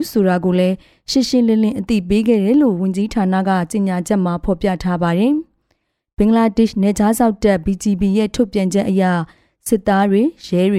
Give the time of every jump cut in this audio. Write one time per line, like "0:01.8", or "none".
none